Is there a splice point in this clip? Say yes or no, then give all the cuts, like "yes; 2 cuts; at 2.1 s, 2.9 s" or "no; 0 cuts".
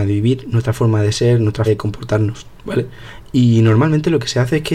yes; 1 cut; at 1.7 s